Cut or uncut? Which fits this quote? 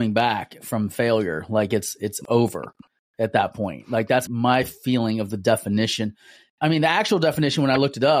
cut